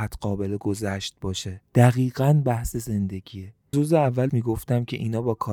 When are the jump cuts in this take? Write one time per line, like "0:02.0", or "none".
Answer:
0:01.7
0:03.7
0:04.3